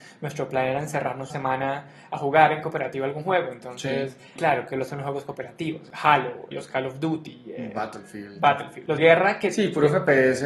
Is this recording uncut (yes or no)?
no